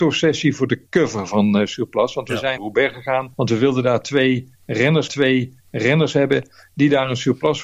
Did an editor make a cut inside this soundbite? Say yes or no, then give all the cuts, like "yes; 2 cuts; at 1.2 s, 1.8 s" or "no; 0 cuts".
yes; 3 cuts; at 2.6 s, 3.3 s, 5.1 s